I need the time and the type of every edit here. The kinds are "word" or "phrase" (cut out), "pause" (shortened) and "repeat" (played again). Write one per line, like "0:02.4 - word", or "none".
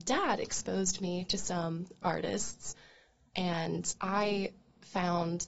0:02.0 - word
0:04.0 - pause